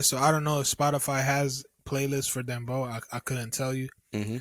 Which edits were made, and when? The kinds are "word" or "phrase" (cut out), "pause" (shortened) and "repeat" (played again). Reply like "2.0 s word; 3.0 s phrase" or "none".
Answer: 1.8 s word